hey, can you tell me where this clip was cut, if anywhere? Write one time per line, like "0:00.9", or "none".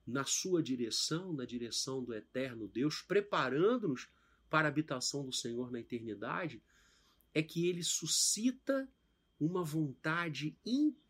none

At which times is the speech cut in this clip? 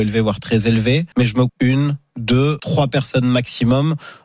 0:01.1
0:01.5
0:02.6

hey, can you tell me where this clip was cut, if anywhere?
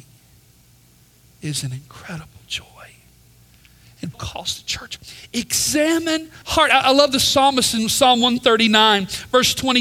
0:04.1
0:06.4

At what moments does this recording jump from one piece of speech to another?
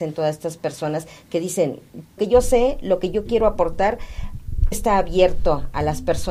0:02.2
0:04.7

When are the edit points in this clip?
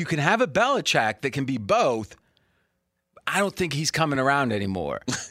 none

